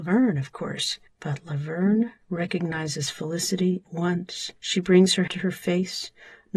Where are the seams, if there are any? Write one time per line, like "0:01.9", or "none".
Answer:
0:01.1
0:03.8
0:04.6
0:05.3